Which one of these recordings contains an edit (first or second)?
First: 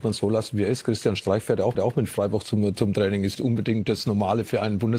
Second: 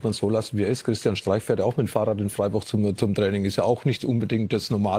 first